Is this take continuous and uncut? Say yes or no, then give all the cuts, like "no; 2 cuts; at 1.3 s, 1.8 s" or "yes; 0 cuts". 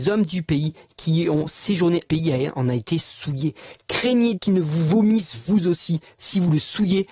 no; 2 cuts; at 2.1 s, 4.3 s